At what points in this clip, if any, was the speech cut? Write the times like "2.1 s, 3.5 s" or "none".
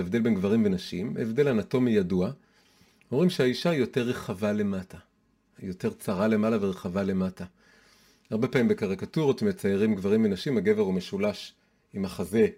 none